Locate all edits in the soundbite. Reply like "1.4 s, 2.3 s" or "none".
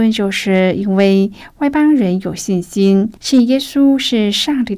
3.2 s